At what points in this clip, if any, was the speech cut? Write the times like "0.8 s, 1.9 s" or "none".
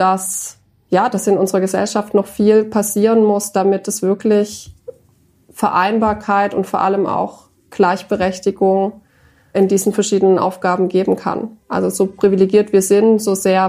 9.5 s